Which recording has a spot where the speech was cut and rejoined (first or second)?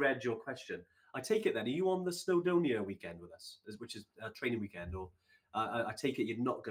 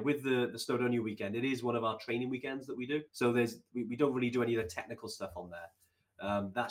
second